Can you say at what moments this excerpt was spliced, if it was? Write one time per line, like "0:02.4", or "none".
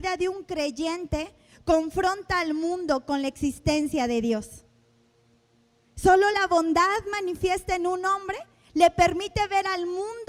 none